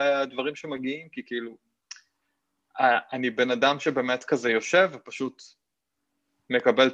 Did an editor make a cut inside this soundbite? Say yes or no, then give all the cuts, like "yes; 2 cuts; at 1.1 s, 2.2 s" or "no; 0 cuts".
no; 0 cuts